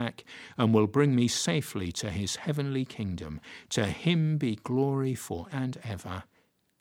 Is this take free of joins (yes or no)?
no